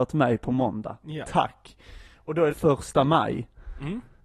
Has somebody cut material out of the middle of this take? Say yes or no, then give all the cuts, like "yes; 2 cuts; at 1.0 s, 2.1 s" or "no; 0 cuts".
yes; 1 cut; at 2.5 s